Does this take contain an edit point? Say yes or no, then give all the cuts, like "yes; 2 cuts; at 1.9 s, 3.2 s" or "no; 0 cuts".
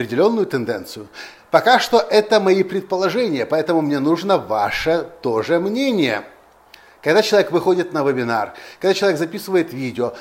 no; 0 cuts